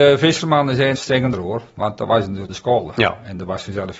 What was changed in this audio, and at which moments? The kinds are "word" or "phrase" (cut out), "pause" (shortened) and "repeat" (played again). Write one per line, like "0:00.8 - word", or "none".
0:00.9 - word
0:01.3 - phrase
0:02.5 - phrase

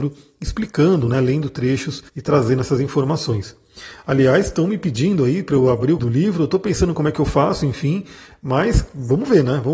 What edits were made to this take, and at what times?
0:02.1 - pause
0:06.0 - word

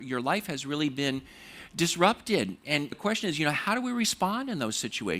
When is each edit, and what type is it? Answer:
0:02.9 - word

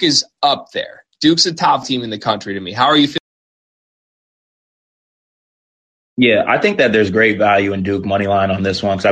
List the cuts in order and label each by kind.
0:01.8 - word

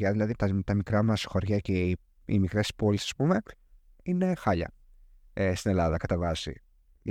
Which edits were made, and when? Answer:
none

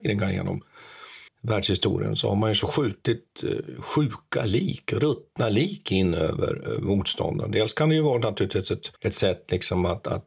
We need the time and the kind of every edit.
0:01.3 - pause
0:09.0 - pause

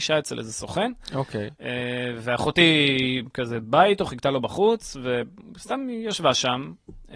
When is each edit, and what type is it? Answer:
none

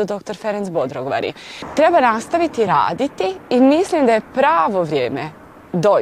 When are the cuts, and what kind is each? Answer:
none

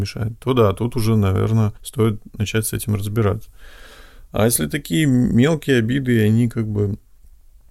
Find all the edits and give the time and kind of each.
0:01.8 - pause

